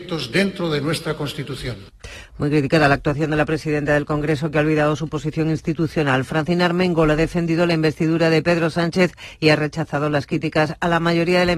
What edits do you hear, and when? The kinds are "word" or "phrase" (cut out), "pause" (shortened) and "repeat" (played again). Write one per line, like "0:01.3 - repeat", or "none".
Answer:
none